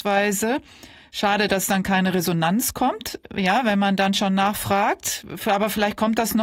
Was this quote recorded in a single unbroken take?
yes; 0 cuts

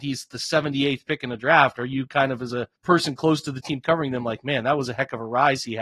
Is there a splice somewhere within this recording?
yes; 1 cut; at 2.8 s

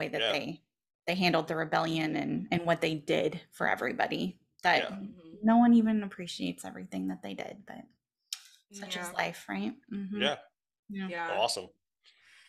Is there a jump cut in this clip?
no; 0 cuts

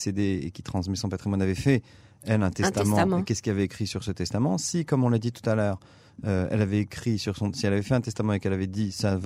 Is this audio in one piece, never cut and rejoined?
yes; 0 cuts

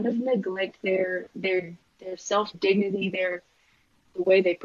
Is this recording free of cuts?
no; 2 cuts; at 1.8 s, 2.5 s

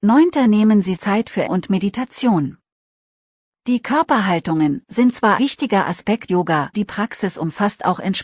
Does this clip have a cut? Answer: yes; 6 cuts; at 1.0 s, 1.5 s, 4.8 s, 5.4 s, 6.3 s, 6.7 s

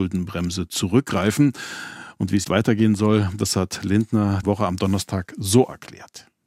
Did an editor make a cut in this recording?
yes; 2 cuts; at 2.4 s, 4.4 s

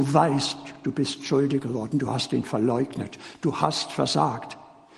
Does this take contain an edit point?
no; 0 cuts

